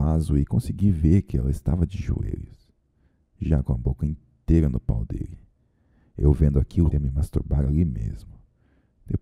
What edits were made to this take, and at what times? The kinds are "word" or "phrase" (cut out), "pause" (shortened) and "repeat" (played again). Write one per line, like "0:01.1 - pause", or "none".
0:06.9 - word